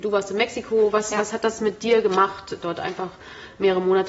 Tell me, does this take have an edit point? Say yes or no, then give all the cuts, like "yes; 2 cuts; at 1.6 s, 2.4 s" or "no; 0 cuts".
no; 0 cuts